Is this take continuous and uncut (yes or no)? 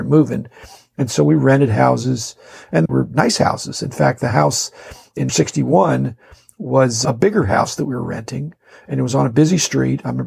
no